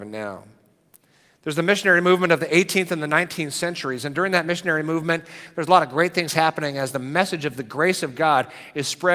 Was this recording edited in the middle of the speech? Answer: no; 0 cuts

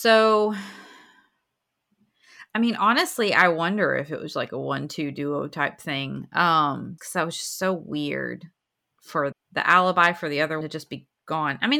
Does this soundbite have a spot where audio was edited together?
yes; 3 cuts; at 7.0 s, 9.3 s, 10.6 s

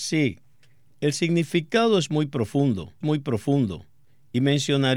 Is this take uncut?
no; 1 cut; at 3.0 s

